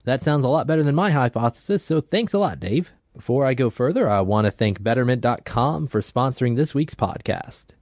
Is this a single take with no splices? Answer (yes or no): no